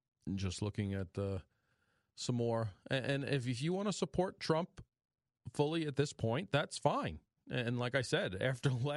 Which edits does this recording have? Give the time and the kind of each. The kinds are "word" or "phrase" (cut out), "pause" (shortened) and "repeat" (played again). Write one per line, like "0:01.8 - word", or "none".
none